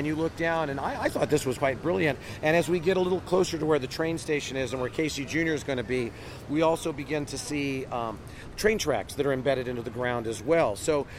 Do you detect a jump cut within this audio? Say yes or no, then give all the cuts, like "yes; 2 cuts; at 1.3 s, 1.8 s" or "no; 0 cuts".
yes; 1 cut; at 1.6 s